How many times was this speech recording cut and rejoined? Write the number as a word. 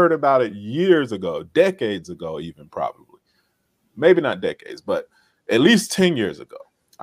zero